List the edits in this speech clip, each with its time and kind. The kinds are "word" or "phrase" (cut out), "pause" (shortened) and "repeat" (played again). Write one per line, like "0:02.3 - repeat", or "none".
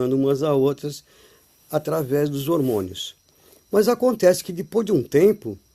none